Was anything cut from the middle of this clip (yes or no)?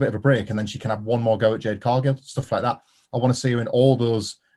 no